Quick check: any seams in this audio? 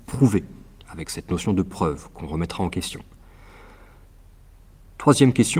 no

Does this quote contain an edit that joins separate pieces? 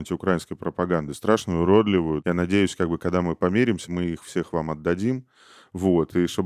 no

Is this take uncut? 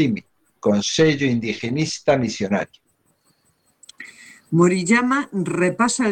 yes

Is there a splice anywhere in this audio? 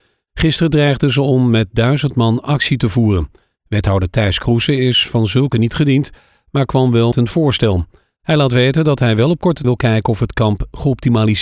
yes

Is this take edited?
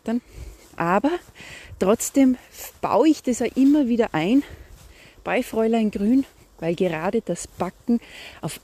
no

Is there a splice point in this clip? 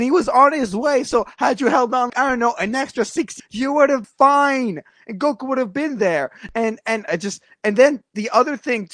yes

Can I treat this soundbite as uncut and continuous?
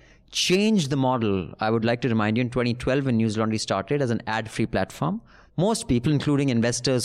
yes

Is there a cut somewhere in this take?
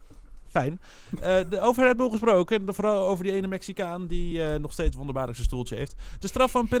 no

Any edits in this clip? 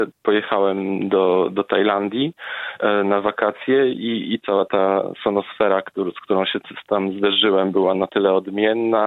no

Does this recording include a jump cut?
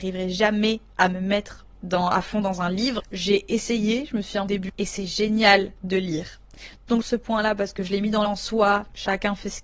yes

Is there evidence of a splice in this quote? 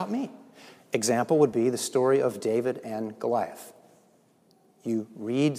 no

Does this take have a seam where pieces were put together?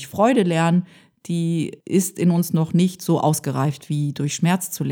no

